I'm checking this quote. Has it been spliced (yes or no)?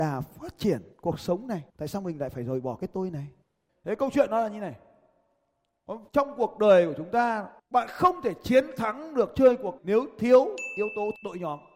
yes